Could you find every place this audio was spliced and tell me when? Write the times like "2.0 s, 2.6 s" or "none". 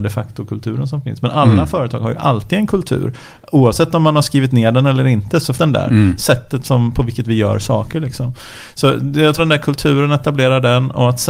5.6 s, 9.4 s